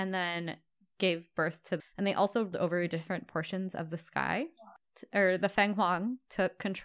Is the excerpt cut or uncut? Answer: cut